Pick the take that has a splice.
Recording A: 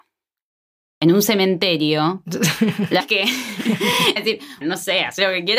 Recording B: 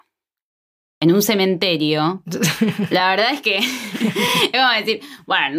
A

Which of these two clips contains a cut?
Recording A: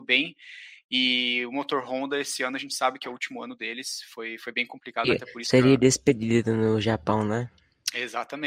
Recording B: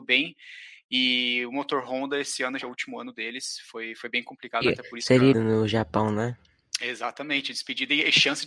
B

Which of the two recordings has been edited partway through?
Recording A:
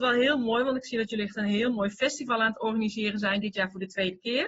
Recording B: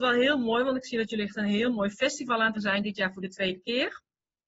B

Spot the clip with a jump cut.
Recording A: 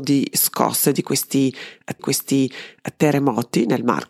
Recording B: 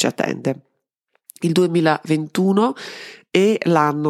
A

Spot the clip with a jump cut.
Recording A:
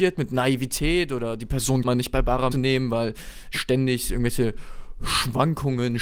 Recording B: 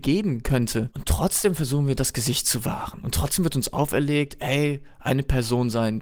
A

